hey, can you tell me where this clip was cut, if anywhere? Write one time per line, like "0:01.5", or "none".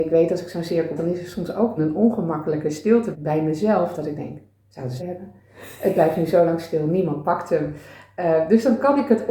0:01.0
0:01.8
0:03.1
0:05.0